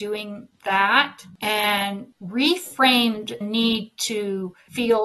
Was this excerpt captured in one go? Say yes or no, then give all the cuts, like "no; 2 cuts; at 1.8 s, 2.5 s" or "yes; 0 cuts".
no; 1 cut; at 3.4 s